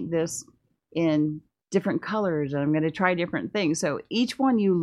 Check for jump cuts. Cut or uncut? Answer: uncut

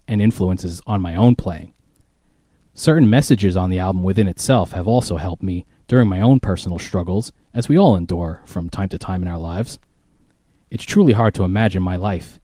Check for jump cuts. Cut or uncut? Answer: uncut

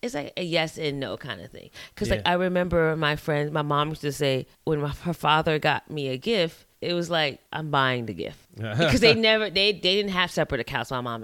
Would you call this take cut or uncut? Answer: cut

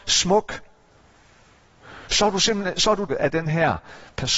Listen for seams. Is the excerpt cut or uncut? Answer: cut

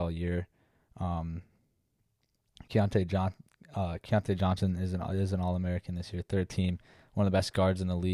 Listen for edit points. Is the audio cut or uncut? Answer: uncut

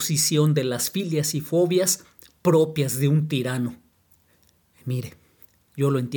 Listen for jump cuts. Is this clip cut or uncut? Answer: uncut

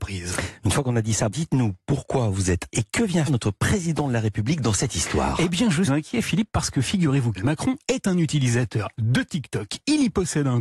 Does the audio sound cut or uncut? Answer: cut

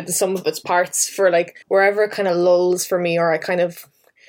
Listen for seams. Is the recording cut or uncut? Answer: cut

